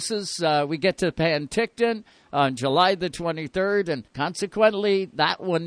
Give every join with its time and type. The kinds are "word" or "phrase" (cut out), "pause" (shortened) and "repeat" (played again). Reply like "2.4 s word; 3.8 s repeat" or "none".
4.1 s pause